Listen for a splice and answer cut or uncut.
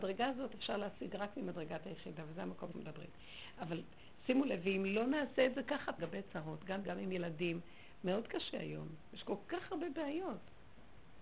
cut